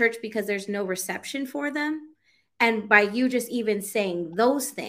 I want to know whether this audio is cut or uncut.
uncut